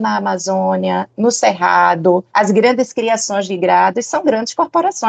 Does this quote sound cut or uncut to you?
cut